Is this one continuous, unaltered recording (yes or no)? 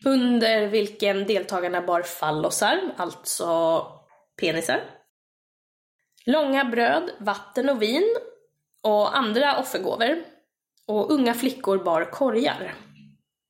yes